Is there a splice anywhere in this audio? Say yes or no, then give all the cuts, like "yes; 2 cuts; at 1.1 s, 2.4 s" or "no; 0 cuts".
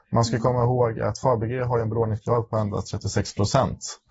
no; 0 cuts